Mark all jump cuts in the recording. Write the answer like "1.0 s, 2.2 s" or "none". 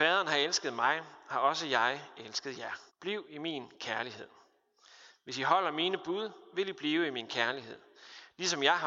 2.9 s